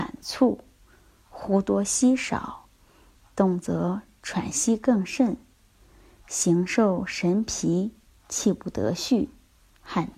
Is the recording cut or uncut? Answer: uncut